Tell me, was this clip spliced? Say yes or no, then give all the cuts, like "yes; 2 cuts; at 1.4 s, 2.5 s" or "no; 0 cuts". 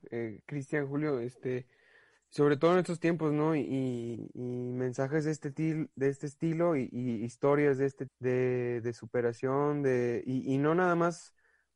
yes; 1 cut; at 8.1 s